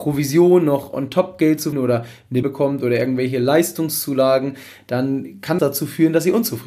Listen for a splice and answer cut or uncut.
cut